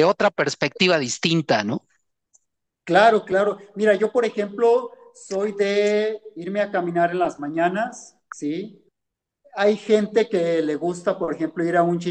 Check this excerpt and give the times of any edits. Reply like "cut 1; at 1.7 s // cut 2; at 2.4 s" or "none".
none